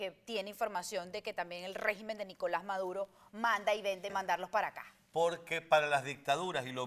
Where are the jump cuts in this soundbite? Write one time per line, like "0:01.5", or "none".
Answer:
0:04.1

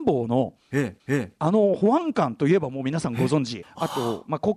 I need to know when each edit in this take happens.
0:01.0
0:03.6

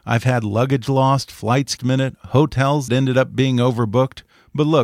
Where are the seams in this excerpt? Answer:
0:01.8
0:02.9

